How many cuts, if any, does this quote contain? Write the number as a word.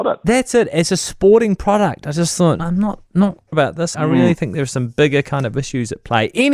three